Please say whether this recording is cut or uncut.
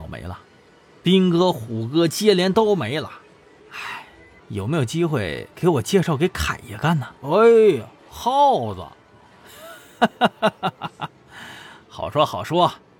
cut